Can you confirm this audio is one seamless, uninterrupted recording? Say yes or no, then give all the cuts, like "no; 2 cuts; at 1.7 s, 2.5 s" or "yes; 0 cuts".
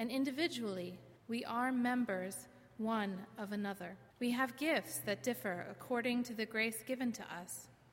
no; 2 cuts; at 1.2 s, 4.1 s